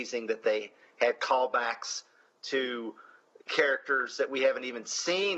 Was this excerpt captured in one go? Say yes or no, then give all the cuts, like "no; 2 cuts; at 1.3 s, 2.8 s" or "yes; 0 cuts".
yes; 0 cuts